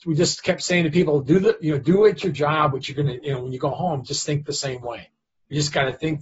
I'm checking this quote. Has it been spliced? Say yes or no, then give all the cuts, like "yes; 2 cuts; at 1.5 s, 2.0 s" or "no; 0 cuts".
no; 0 cuts